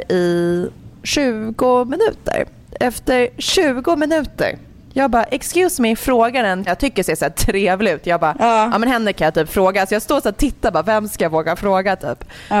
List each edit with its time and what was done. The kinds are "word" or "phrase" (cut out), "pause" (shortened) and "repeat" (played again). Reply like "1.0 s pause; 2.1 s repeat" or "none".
6.7 s word

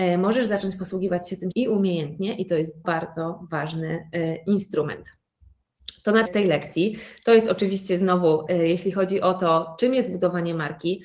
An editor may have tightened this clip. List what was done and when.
1.5 s word; 2.8 s word; 6.3 s word; 8.5 s word

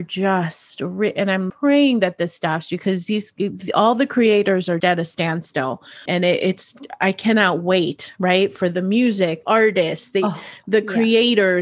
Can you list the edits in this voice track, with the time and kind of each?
1.5 s word; 4.8 s word; 6.1 s word; 9.4 s word

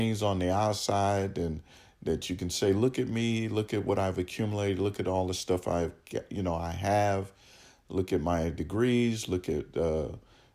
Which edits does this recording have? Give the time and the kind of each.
none

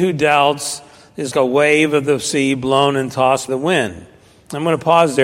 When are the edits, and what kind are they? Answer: 1.3 s word; 3.5 s word

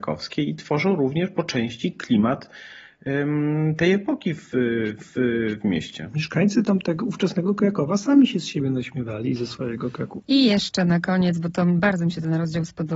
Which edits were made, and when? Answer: 5.0 s repeat

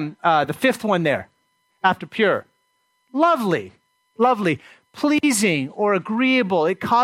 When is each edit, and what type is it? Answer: none

